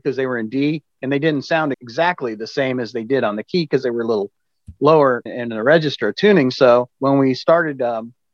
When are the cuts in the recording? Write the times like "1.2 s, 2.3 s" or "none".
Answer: 0.9 s, 1.7 s, 5.3 s, 6.9 s